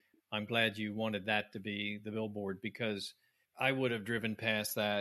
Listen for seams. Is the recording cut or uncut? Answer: uncut